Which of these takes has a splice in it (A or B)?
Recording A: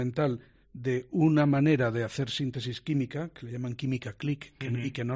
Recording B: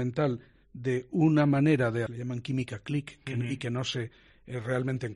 B